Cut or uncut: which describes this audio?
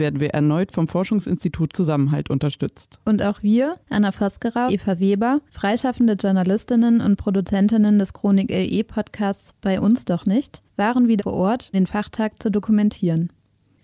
cut